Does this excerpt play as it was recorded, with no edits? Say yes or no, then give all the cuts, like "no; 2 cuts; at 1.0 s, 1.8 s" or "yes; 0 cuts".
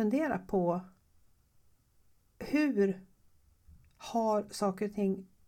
yes; 0 cuts